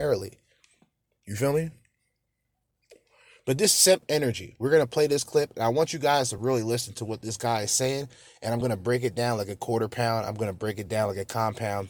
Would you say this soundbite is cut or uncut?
uncut